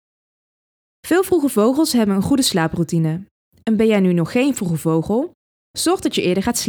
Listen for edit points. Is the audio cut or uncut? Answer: uncut